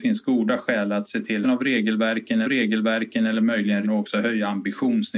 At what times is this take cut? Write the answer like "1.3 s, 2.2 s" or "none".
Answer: 1.4 s, 2.4 s, 3.8 s